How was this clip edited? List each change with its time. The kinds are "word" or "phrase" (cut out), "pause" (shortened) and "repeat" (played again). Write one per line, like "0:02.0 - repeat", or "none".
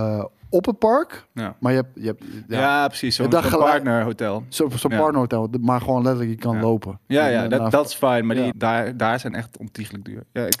0:08.5 - phrase